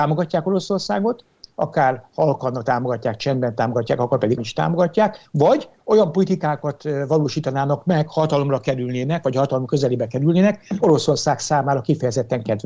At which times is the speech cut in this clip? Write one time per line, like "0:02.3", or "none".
0:04.4
0:05.3
0:10.8